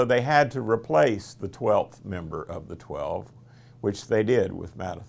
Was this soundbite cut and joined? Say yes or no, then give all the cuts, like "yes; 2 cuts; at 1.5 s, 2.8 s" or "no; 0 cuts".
no; 0 cuts